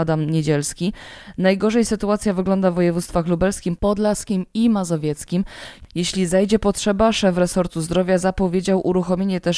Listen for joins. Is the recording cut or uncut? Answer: uncut